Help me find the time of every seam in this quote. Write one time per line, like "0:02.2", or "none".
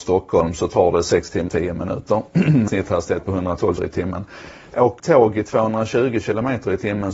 0:01.5
0:02.7
0:03.8
0:05.0